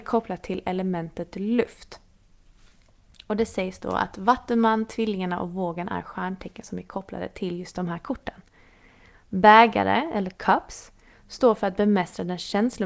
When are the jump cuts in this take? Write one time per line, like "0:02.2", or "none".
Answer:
none